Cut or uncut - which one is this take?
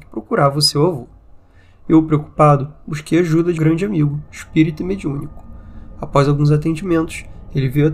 cut